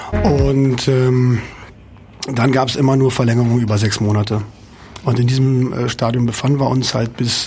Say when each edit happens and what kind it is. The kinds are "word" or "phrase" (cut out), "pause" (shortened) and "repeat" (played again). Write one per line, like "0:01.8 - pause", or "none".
none